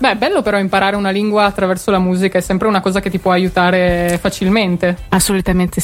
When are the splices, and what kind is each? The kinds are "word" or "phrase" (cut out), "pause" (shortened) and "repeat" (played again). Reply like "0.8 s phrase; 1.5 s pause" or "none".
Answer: none